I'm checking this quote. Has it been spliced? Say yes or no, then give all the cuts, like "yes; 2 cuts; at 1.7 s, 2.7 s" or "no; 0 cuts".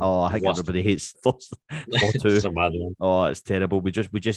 yes; 2 cuts; at 1.1 s, 2.4 s